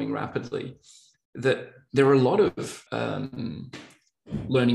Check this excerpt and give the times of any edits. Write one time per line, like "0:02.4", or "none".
0:02.9

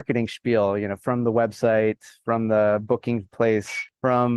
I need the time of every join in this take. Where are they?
none

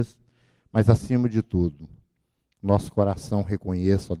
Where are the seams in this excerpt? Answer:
none

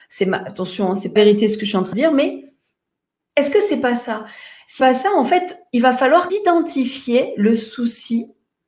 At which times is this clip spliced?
0:01.2
0:01.9
0:04.8
0:06.3

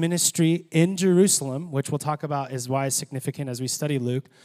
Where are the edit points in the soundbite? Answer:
none

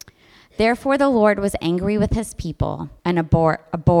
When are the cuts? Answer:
0:03.0

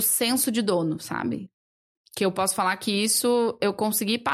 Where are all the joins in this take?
none

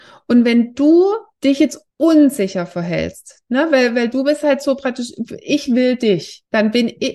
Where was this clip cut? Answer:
0:01.9

